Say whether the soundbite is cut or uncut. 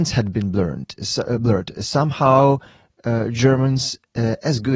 uncut